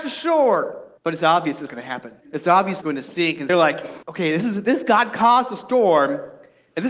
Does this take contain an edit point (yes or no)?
yes